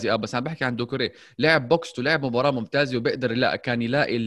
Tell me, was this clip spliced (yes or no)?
yes